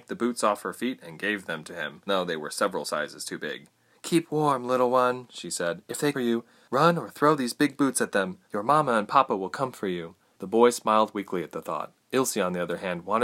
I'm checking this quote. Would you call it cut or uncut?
cut